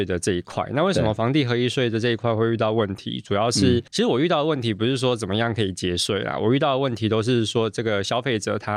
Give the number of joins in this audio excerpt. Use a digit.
1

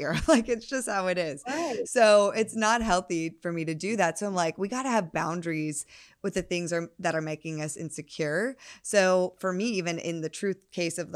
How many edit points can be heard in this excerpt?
0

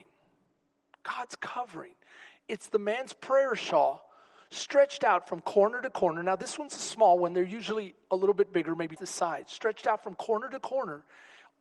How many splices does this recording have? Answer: 1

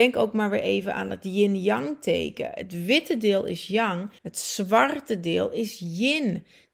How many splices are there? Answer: 1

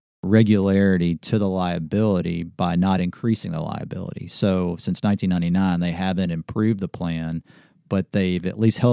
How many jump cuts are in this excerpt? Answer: 0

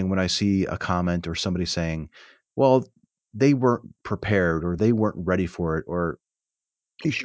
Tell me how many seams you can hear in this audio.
0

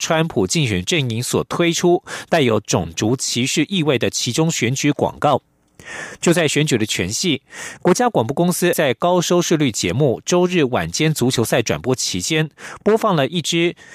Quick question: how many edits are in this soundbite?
1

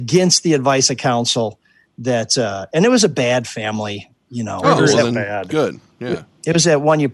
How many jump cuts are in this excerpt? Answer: 0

